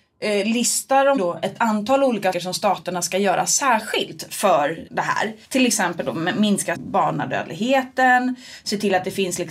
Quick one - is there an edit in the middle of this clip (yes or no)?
yes